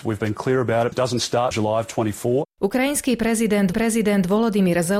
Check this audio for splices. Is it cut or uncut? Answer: cut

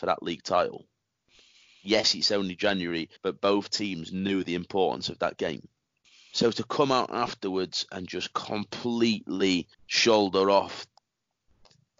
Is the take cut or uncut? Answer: cut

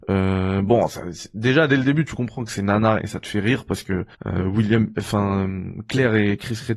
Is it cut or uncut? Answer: cut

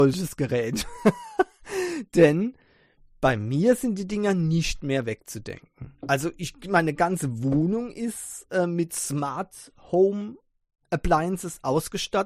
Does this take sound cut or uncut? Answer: uncut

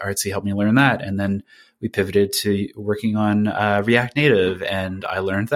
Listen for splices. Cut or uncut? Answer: uncut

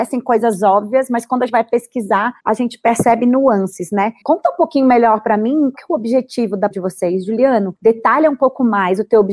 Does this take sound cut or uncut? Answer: cut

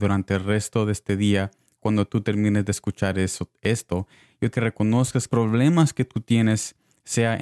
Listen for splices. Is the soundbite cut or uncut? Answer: cut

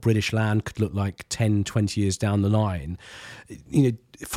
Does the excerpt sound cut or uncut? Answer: uncut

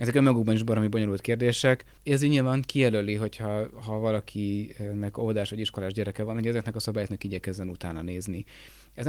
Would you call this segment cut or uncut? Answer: uncut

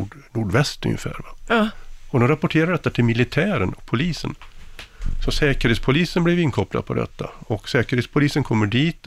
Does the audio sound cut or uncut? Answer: uncut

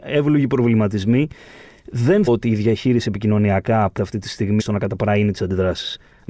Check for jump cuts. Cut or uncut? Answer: cut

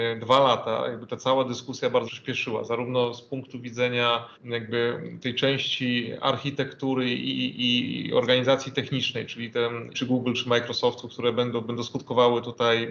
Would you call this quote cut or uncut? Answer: cut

